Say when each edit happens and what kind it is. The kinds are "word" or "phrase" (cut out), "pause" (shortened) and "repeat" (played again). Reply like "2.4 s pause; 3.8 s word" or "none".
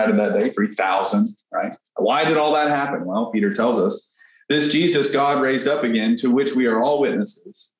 none